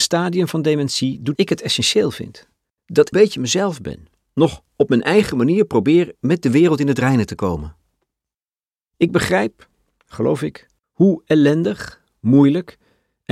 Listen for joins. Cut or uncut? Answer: cut